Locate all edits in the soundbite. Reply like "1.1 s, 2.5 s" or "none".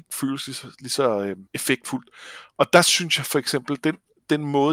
1.5 s